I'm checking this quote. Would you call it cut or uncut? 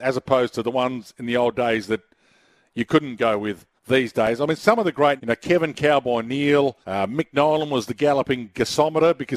cut